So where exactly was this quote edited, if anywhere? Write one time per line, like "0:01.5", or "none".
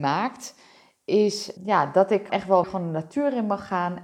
0:01.6
0:02.3
0:02.6